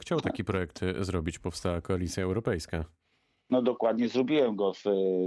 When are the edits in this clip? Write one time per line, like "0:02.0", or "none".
none